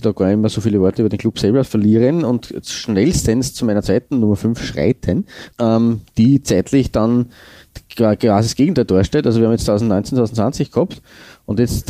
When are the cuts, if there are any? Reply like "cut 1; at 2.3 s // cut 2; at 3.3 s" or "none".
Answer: cut 1; at 5.5 s